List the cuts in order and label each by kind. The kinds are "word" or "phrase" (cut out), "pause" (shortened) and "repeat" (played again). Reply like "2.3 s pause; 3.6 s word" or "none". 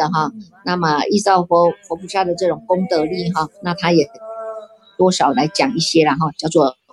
3.5 s pause